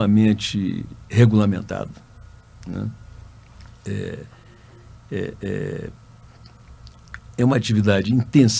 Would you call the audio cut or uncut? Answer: cut